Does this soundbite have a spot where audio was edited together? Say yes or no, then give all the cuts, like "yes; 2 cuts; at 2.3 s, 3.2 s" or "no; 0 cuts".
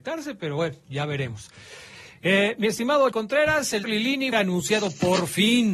yes; 3 cuts; at 3.1 s, 3.8 s, 4.3 s